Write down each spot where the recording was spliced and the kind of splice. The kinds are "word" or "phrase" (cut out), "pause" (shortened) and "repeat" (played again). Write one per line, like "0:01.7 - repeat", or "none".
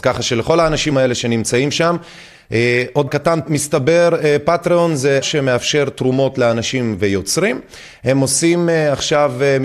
0:00.9 - word
0:03.1 - word
0:03.5 - word
0:05.2 - word